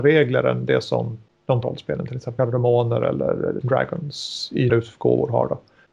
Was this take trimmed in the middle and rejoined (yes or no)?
yes